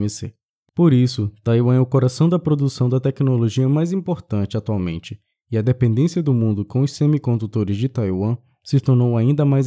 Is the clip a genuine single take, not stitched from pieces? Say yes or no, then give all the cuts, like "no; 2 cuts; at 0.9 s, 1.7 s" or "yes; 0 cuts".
yes; 0 cuts